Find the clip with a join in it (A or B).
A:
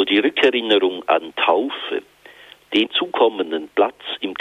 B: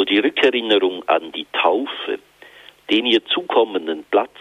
A